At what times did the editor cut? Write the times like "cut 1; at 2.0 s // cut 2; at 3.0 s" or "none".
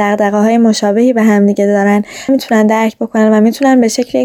cut 1; at 2.3 s